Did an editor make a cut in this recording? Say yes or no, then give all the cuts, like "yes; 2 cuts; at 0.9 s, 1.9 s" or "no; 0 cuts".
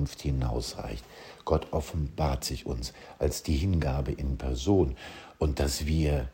no; 0 cuts